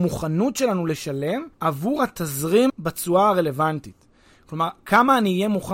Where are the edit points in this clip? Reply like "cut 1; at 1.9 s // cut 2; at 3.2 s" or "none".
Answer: cut 1; at 1.5 s // cut 2; at 2.7 s